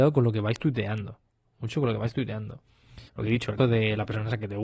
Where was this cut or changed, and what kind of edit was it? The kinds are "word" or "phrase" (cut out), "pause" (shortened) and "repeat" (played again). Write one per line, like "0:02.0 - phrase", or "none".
0:01.7 - word
0:03.1 - pause
0:03.6 - word

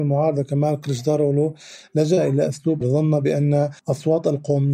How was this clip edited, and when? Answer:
0:02.8 - word
0:03.8 - pause

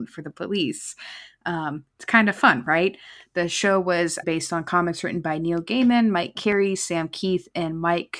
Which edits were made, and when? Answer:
0:01.9 - pause
0:04.2 - word

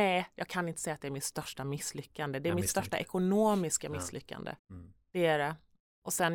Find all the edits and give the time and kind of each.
0:04.6 - pause

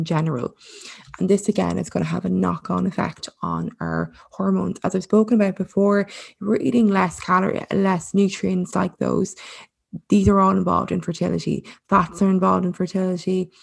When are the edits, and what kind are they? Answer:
none

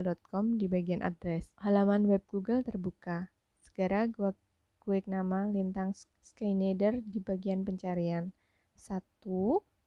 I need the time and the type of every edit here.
0:01.5 - pause
0:05.0 - word
0:06.1 - pause

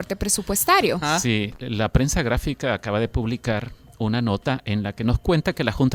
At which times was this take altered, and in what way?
none

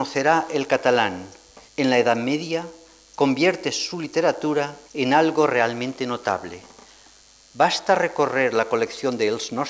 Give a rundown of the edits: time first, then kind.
0:01.7 - pause
0:04.9 - pause

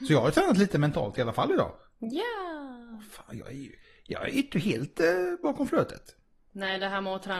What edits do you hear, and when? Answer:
none

